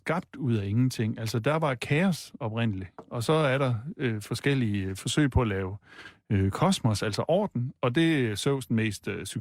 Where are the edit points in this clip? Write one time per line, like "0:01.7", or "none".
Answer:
none